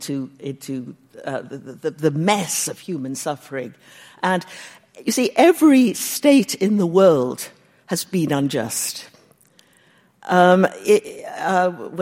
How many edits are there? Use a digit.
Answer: 0